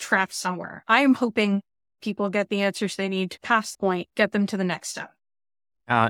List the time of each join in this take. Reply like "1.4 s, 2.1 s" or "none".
2.0 s, 3.4 s, 3.7 s, 4.1 s